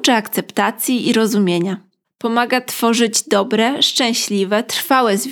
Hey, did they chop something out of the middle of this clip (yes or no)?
no